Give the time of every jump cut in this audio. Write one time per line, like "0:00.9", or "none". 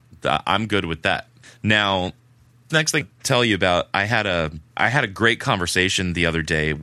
0:02.7
0:03.0
0:04.7